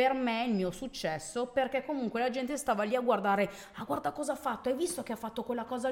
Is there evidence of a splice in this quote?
no; 0 cuts

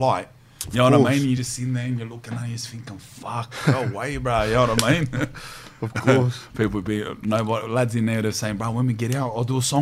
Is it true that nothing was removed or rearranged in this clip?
yes; 0 cuts

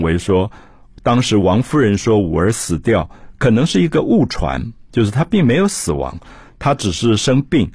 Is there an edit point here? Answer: no; 0 cuts

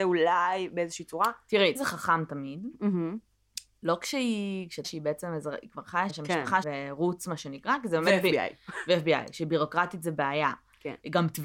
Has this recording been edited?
yes; 4 cuts; at 1.8 s, 4.8 s, 6.1 s, 6.6 s

